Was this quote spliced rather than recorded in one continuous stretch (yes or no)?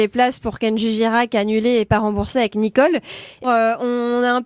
yes